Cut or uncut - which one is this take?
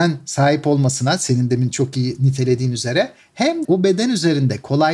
cut